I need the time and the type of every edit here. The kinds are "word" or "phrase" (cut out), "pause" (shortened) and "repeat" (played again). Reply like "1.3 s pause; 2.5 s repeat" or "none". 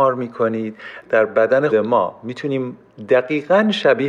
1.0 s phrase; 1.7 s word